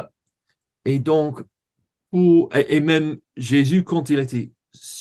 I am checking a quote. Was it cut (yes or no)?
no